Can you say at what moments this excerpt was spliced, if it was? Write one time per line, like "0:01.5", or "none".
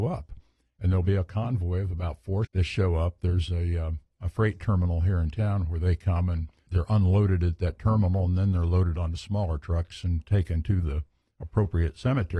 0:02.4
0:06.7